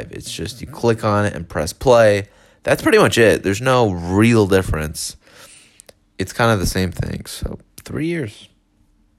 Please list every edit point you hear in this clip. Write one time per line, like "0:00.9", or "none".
none